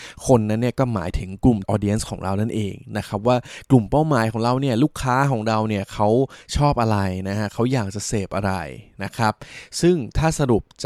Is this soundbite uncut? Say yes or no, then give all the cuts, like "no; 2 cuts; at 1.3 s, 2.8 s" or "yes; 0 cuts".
no; 1 cut; at 1.6 s